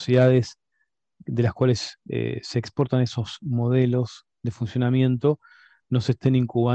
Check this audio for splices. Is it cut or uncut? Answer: uncut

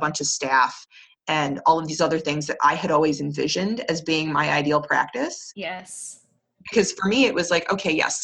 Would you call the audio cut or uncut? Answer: uncut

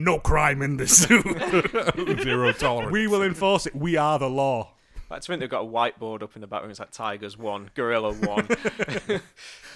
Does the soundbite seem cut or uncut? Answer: uncut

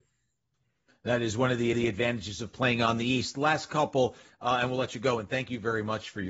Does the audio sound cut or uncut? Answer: cut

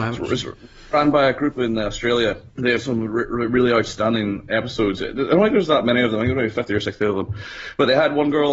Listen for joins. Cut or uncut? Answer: cut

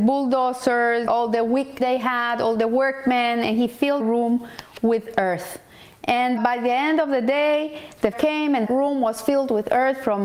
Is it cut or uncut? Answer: cut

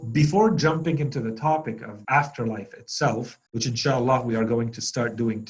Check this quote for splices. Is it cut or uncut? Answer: cut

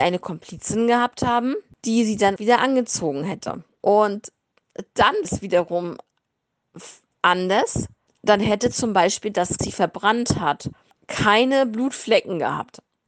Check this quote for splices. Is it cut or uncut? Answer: cut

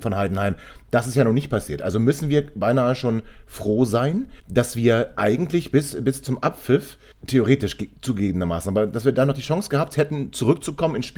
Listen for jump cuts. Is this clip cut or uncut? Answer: cut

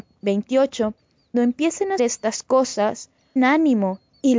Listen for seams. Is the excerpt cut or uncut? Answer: cut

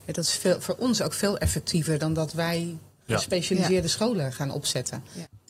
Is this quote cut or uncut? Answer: uncut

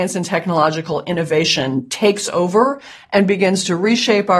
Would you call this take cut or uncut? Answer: uncut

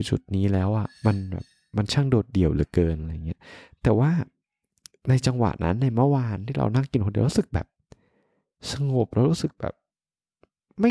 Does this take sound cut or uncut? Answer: uncut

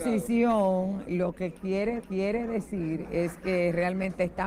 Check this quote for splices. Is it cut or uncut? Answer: cut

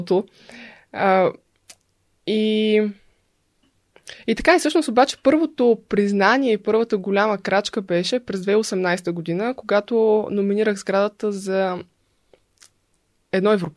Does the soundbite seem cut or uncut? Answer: uncut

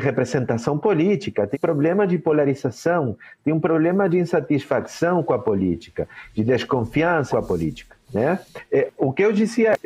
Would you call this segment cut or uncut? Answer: cut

